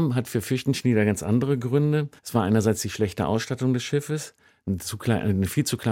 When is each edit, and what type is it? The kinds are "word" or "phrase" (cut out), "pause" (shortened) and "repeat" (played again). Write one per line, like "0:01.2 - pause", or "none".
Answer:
0:02.2 - pause